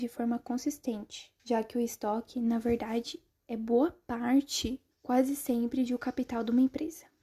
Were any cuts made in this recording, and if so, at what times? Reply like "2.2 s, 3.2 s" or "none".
1.4 s, 4.9 s